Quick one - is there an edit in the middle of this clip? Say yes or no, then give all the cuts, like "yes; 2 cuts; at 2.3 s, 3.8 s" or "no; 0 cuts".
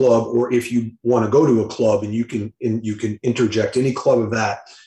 no; 0 cuts